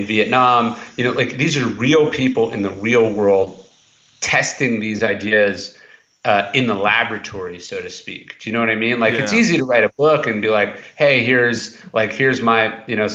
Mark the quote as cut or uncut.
uncut